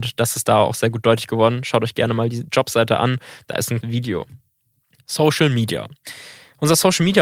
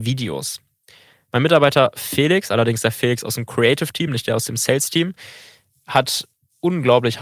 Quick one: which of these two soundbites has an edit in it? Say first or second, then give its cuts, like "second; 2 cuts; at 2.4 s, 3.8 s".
first; 1 cut; at 3.8 s